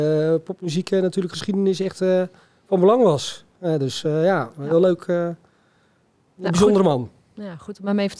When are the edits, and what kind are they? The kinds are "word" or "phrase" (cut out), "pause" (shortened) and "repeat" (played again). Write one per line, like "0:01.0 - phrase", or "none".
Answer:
none